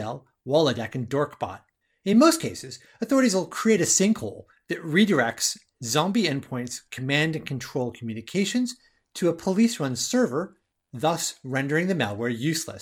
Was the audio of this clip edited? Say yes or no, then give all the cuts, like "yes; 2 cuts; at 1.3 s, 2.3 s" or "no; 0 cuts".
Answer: no; 0 cuts